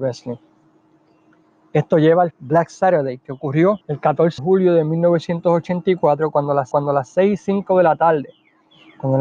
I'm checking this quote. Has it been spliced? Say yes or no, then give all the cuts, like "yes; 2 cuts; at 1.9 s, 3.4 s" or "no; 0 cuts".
yes; 4 cuts; at 2.3 s, 3.8 s, 4.4 s, 6.7 s